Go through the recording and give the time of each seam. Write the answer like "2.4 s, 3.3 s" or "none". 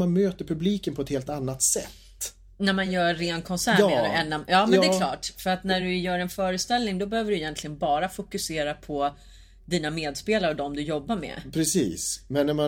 none